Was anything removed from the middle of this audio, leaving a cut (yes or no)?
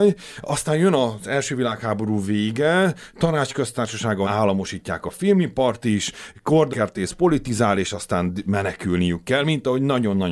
yes